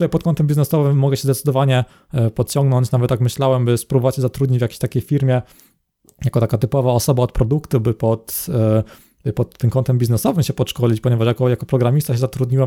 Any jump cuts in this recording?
no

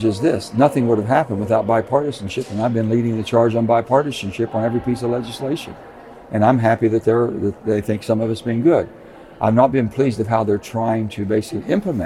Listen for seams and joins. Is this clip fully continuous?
no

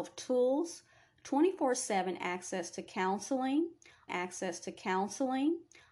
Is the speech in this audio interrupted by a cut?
yes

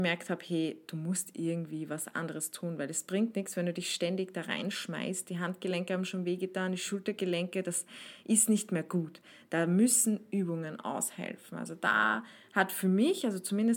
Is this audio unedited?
yes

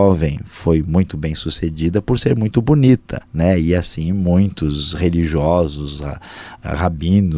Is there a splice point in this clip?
yes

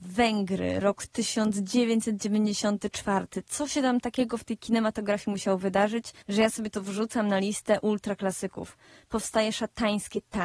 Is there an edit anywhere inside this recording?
yes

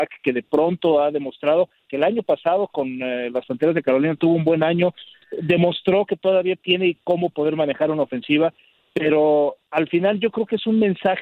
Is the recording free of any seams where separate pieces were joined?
yes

